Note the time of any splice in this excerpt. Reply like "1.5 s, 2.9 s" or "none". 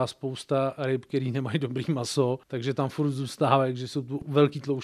2.4 s